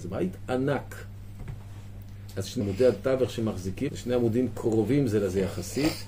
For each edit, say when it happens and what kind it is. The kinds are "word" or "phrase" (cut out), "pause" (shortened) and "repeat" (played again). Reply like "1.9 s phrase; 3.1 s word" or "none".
2.6 s word; 3.9 s word